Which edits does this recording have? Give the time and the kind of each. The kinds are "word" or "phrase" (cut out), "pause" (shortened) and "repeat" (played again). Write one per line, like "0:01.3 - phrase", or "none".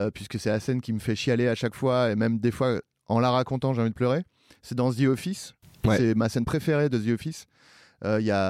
none